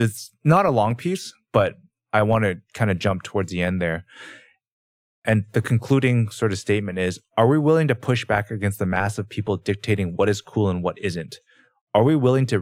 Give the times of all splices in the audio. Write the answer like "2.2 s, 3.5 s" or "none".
none